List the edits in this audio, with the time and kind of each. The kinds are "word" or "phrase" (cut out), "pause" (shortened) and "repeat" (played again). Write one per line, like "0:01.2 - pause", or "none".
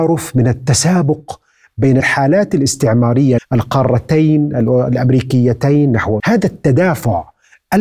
0:02.0 - word
0:03.4 - word
0:06.2 - word